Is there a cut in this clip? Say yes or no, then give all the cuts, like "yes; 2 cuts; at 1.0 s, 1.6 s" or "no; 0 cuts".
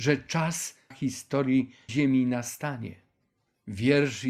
yes; 2 cuts; at 0.9 s, 1.9 s